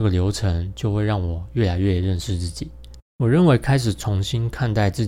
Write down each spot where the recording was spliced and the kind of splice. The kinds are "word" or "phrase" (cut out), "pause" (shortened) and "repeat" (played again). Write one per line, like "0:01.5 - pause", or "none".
0:03.1 - pause